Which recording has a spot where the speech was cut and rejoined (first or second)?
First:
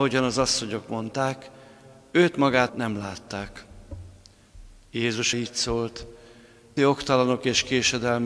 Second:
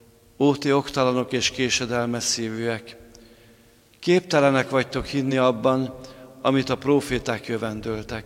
first